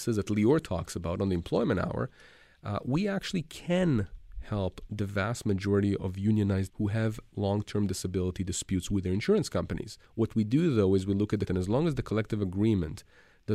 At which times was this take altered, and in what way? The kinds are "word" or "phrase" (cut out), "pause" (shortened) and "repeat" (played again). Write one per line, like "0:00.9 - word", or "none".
0:06.7 - word
0:10.1 - pause
0:11.5 - phrase